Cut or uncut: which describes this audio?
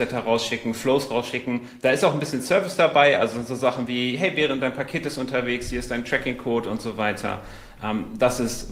uncut